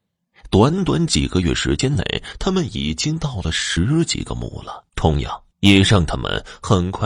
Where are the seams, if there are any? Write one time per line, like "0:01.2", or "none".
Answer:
0:04.9
0:05.5